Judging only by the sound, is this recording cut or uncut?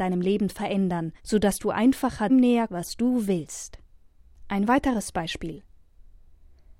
cut